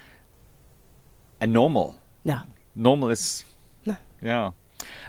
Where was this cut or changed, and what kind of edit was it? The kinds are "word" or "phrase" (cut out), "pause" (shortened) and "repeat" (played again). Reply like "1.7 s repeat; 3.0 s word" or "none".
none